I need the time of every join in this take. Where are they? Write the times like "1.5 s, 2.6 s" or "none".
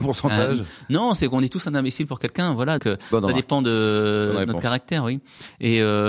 2.8 s

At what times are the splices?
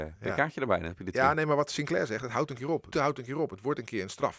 2.9 s

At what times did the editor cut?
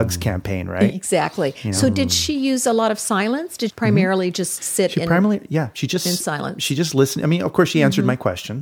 3.7 s

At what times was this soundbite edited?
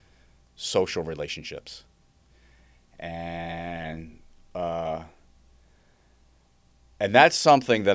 none

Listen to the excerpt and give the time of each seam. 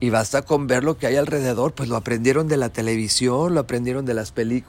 none

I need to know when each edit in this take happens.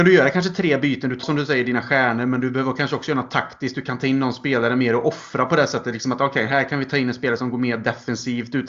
1.2 s

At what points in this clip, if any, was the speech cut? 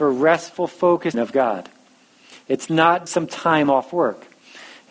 1.1 s, 3.1 s

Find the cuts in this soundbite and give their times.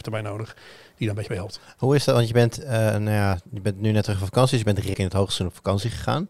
4.9 s

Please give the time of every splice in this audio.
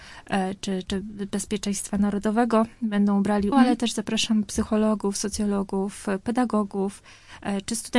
3.5 s

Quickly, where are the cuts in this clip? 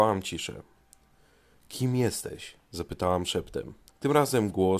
2.6 s, 3.9 s

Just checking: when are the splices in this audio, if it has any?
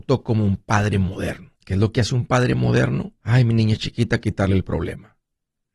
1.6 s, 3.2 s

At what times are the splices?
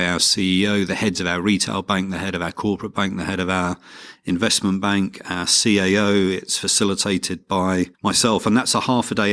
7.9 s

